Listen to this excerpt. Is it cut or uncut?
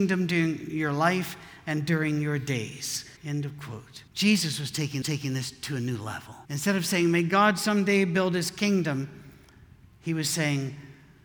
cut